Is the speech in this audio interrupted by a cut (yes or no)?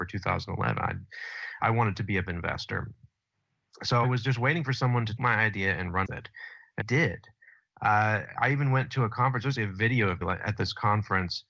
yes